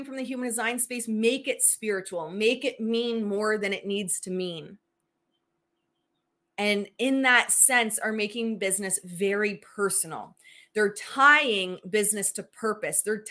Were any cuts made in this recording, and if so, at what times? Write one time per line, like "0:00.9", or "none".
none